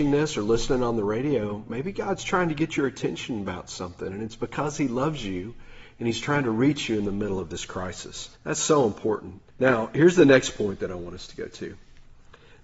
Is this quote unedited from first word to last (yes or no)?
no